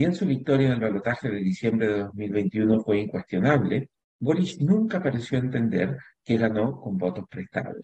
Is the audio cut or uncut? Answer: uncut